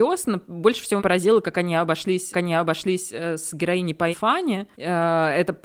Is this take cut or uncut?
cut